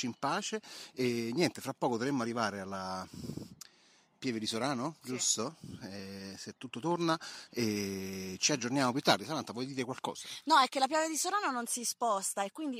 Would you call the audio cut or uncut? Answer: uncut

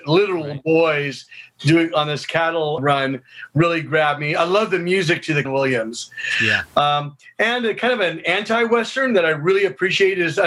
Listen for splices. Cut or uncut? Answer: cut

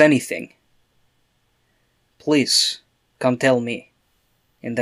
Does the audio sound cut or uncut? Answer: uncut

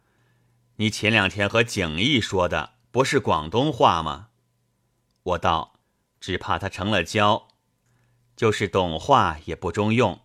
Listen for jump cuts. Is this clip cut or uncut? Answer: cut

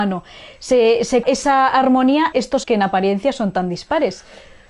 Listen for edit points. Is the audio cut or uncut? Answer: cut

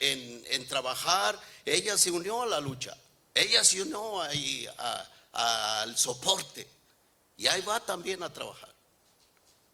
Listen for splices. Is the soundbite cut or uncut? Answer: uncut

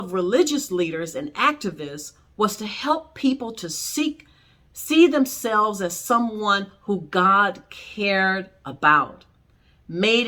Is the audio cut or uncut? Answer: uncut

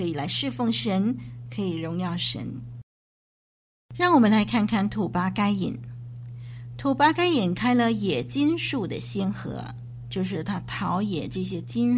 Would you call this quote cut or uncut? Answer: uncut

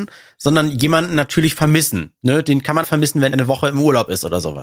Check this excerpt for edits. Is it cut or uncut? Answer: cut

